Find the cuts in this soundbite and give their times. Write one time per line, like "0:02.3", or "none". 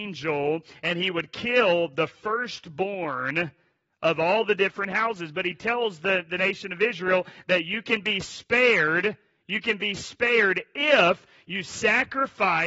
none